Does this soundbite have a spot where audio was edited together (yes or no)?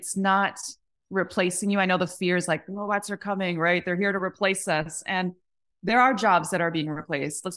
no